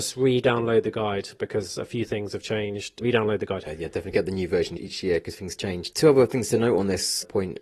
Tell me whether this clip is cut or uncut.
uncut